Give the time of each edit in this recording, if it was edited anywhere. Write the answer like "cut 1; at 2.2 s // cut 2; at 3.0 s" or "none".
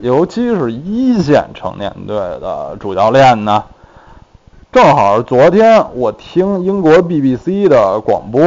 none